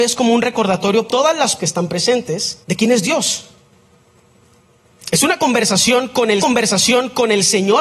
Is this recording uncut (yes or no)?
no